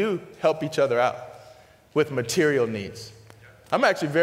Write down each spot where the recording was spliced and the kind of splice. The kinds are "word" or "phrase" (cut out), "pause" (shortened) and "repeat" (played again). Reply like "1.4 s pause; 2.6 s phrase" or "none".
none